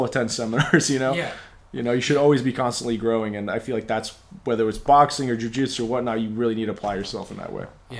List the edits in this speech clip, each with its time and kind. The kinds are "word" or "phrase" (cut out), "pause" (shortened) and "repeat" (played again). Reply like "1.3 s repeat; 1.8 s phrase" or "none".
none